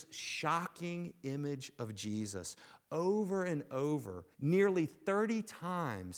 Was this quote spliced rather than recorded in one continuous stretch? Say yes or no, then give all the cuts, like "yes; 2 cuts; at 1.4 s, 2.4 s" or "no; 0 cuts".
yes; 1 cut; at 4.3 s